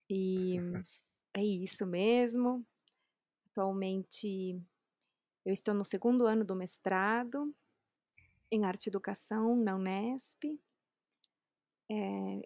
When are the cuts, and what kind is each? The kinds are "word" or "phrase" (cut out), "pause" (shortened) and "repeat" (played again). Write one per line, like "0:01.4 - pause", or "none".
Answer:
none